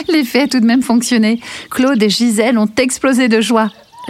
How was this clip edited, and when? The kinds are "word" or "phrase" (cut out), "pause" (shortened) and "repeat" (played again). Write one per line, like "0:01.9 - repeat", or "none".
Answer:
none

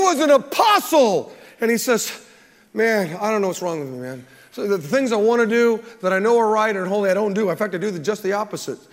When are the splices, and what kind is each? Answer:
none

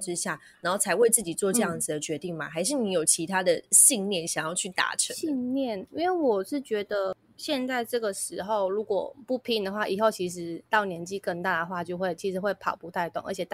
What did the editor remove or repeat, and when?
0:10.7 - pause

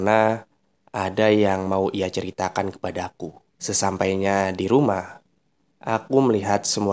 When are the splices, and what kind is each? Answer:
0:03.5 - pause

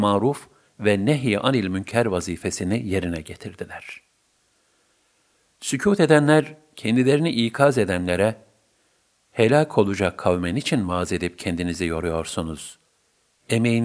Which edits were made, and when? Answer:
none

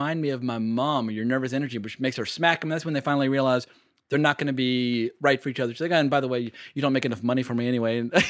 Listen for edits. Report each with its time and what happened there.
none

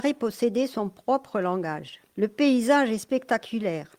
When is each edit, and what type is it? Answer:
0:02.1 - pause

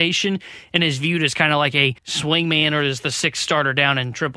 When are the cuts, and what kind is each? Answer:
0:02.0 - pause

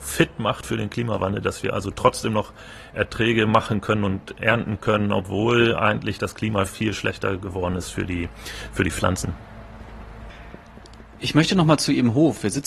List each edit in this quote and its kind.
none

